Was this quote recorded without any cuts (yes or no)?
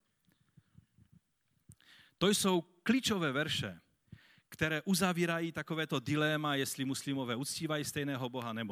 yes